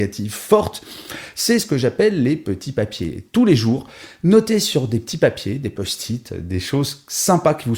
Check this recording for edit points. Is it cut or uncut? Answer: uncut